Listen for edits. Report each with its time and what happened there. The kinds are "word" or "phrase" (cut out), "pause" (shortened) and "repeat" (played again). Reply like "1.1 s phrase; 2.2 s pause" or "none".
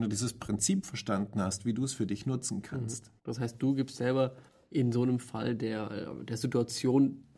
3.2 s pause; 4.5 s pause